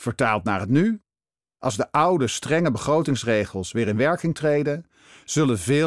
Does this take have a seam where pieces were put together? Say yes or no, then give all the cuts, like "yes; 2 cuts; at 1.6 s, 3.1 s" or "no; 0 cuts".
no; 0 cuts